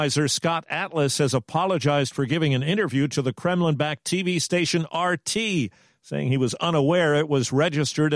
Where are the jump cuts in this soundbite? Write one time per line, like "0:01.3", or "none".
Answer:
none

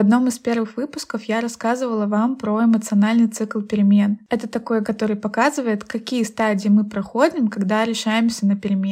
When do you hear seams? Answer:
0:04.8

